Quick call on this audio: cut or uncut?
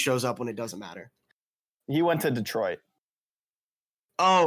uncut